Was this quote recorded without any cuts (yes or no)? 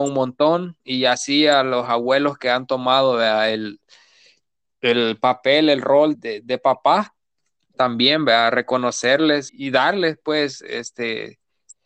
no